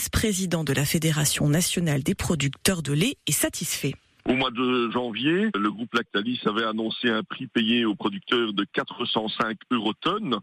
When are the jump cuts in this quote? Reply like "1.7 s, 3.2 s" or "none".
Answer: none